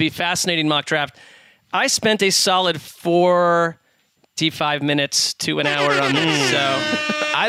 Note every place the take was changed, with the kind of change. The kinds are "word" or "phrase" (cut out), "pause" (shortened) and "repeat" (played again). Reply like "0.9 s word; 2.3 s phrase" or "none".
none